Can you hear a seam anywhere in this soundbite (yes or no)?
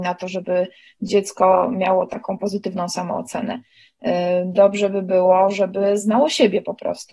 no